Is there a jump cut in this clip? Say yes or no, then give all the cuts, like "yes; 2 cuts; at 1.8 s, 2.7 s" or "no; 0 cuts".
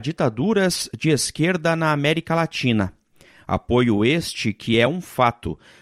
no; 0 cuts